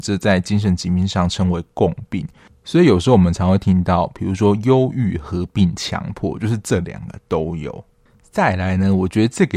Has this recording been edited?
no; 0 cuts

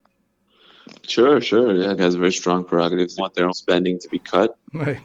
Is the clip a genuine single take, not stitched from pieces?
no; 3 cuts; at 2.0 s, 3.2 s, 3.5 s

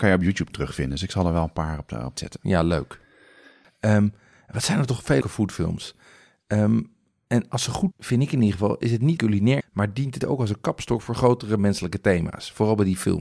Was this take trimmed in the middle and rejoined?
yes; 6 cuts; at 2.1 s, 5.2 s, 7.9 s, 9.2 s, 9.6 s, 10.2 s

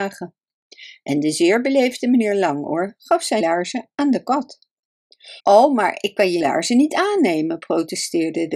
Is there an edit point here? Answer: yes; 3 cuts; at 3.4 s, 5.4 s, 6.4 s

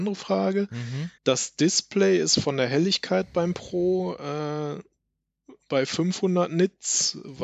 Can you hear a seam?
yes; 1 cut; at 1.2 s

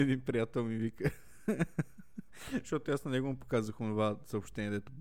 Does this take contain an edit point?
no; 0 cuts

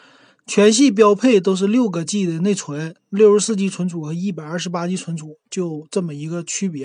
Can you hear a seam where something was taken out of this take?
no; 0 cuts

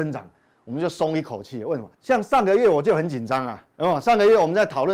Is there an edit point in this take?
yes; 2 cuts; at 1.9 s, 3.7 s

